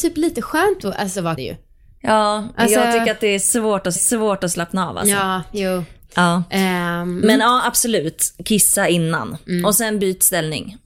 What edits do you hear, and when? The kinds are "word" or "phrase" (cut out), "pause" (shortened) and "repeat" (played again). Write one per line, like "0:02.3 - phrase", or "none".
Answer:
0:01.4 - word
0:04.0 - repeat